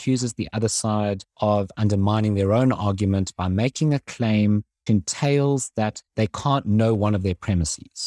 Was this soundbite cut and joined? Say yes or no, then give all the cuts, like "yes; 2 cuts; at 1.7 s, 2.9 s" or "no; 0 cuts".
yes; 3 cuts; at 1.3 s, 4.9 s, 6.1 s